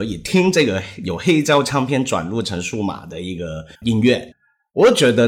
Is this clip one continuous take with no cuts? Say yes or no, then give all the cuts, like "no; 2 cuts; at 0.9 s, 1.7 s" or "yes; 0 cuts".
no; 1 cut; at 3.7 s